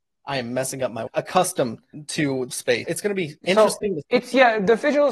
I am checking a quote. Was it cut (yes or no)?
yes